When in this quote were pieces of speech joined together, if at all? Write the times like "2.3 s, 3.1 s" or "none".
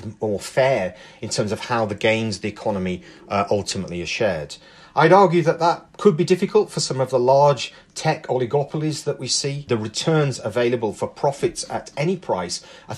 none